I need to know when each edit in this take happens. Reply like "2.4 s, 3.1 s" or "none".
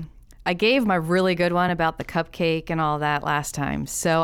none